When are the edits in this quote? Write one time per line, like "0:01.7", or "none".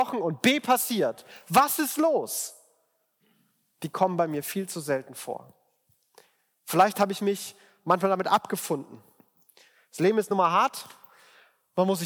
none